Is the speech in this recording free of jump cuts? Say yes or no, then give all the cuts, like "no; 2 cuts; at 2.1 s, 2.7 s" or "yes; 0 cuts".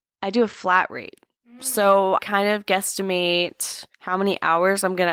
no; 2 cuts; at 2.2 s, 3.9 s